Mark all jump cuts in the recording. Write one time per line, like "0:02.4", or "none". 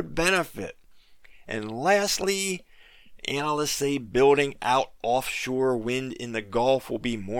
none